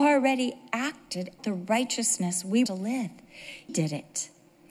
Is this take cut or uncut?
cut